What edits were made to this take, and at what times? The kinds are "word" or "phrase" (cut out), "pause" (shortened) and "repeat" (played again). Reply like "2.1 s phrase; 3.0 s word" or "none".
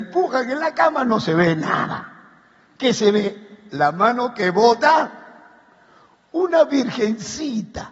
none